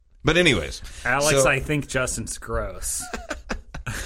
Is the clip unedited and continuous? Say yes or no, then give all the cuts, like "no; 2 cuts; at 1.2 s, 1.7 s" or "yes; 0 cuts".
yes; 0 cuts